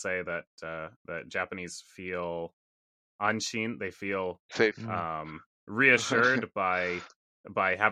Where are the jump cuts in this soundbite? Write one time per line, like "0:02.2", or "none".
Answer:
0:01.0